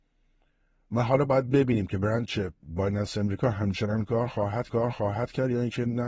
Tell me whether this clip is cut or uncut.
cut